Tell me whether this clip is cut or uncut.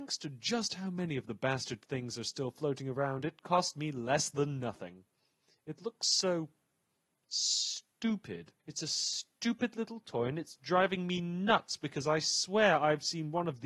cut